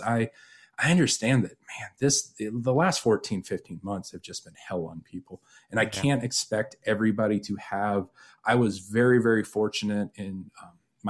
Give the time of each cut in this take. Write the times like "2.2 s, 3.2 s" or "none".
none